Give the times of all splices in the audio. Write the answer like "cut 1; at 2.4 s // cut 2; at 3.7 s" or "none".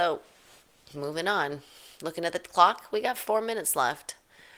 none